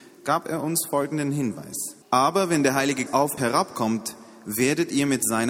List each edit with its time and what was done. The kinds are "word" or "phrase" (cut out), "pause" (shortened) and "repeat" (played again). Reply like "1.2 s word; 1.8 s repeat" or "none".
2.0 s pause; 3.1 s word; 3.4 s word

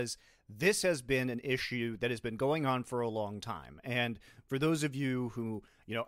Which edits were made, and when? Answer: none

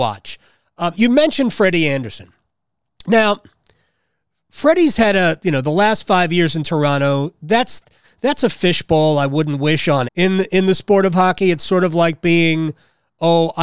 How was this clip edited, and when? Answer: 0.9 s word; 10.0 s word

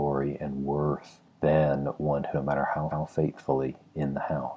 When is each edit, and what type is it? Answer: 1.3 s pause; 2.3 s phrase; 2.9 s repeat

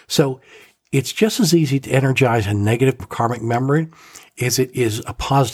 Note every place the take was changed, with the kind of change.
3.0 s word

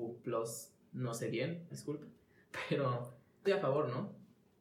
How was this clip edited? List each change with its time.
1.7 s word; 3.4 s phrase

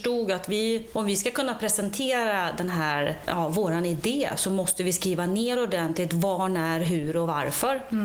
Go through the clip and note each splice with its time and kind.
none

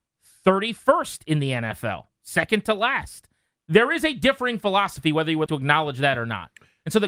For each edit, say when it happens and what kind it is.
5.5 s word

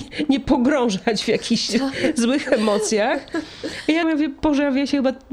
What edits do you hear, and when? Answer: 4.0 s word

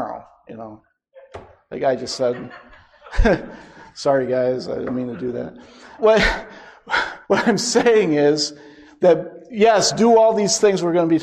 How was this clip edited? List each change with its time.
6.0 s word; 7.2 s pause

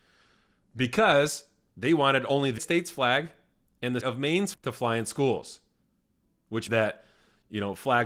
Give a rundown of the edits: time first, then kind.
2.6 s word; 4.0 s word; 4.5 s word; 6.7 s word

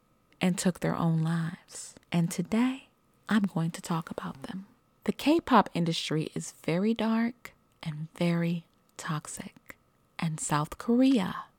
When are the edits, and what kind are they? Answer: 2.0 s pause

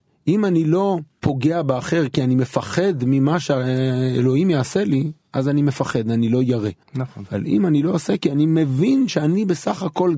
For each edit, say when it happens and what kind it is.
6.8 s pause

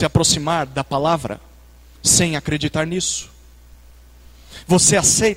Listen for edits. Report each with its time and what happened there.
none

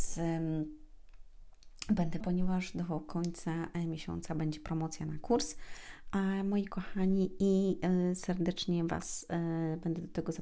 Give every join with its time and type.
2.2 s phrase

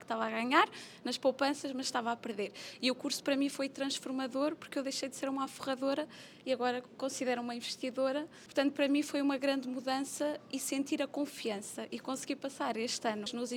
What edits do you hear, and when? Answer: none

